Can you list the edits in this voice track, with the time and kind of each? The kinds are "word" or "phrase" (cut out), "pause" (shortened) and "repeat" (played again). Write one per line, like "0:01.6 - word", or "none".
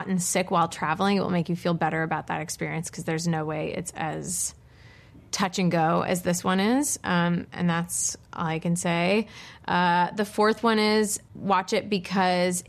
none